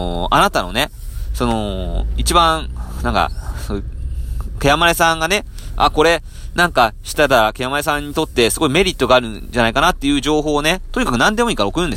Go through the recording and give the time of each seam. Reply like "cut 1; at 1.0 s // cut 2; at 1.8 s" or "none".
none